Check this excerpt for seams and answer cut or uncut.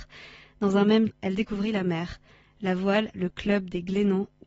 cut